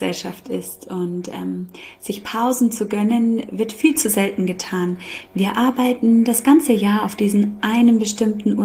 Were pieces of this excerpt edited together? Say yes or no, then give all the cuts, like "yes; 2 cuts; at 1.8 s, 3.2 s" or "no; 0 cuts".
no; 0 cuts